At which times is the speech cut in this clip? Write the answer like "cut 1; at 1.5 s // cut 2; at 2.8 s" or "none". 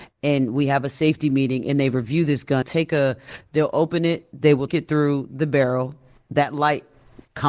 cut 1; at 2.6 s // cut 2; at 4.7 s